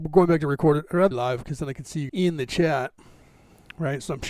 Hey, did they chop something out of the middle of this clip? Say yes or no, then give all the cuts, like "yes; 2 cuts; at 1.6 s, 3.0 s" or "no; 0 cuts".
yes; 2 cuts; at 1.1 s, 2.1 s